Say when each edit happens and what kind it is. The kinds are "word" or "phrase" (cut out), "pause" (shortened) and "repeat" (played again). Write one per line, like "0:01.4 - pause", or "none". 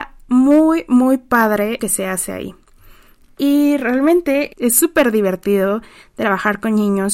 0:01.8 - phrase
0:04.5 - word